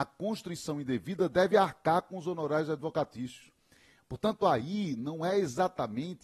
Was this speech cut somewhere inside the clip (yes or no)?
no